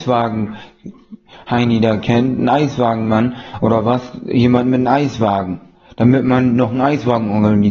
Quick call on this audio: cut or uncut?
uncut